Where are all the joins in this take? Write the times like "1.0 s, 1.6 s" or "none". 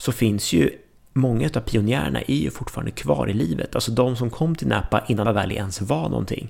5.3 s